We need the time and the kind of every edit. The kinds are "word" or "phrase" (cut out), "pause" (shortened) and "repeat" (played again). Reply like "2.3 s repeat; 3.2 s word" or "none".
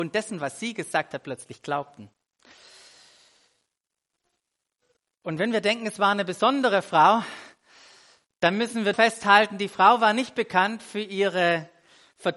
8.9 s word